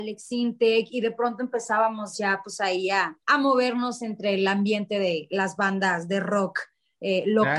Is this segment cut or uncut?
cut